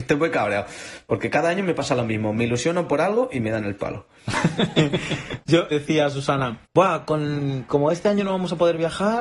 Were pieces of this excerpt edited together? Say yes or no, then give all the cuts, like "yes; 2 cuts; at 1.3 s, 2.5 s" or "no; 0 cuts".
yes; 2 cuts; at 5.7 s, 6.6 s